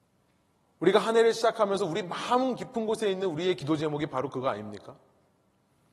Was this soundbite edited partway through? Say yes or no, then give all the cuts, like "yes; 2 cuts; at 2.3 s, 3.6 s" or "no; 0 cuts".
no; 0 cuts